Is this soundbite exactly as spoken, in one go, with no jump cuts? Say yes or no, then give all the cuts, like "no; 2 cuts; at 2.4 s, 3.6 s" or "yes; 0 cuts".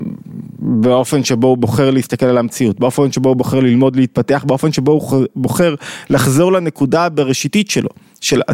yes; 0 cuts